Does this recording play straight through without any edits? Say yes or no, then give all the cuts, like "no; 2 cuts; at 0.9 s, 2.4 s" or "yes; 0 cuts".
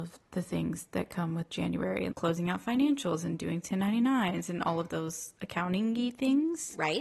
no; 1 cut; at 2.1 s